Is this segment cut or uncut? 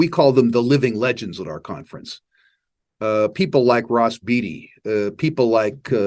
uncut